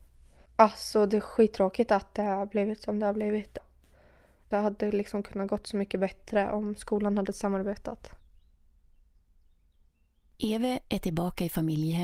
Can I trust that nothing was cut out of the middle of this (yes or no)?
yes